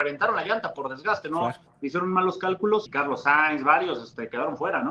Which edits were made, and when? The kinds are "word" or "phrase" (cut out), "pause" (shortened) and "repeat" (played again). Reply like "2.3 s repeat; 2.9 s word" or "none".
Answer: 2.9 s word